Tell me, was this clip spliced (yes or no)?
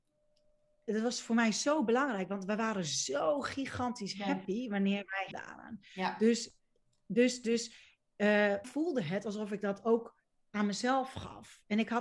yes